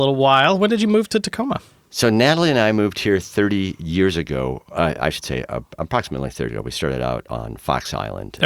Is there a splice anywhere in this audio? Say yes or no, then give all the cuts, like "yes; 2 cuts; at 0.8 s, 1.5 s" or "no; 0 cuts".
yes; 1 cut; at 6.5 s